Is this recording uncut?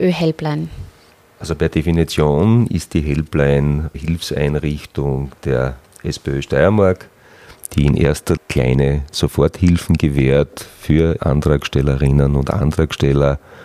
no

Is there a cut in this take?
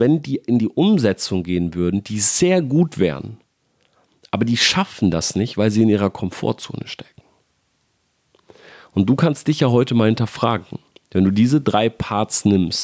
no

